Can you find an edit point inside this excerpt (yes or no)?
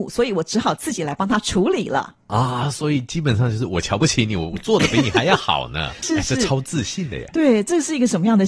yes